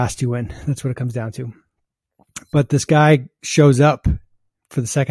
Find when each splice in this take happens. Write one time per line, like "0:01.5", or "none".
none